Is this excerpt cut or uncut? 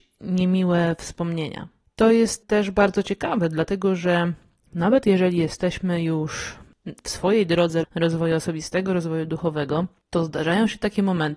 cut